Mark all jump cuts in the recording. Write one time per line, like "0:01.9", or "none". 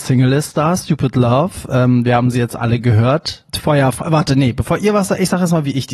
0:03.5

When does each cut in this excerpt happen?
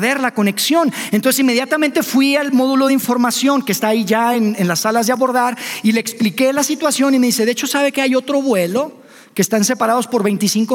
none

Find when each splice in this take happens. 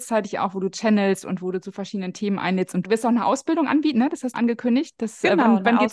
0:02.8
0:04.3

